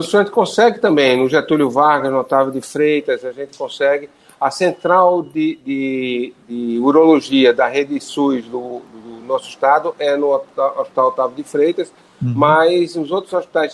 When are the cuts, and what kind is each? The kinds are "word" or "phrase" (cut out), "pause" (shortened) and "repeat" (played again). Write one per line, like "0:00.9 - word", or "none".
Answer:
none